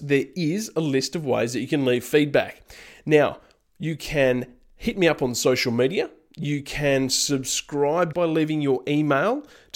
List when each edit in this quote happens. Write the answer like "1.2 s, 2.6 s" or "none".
8.1 s